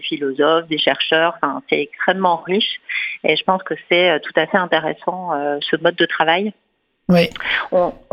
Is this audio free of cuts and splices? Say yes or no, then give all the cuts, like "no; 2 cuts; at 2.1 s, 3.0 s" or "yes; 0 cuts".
yes; 0 cuts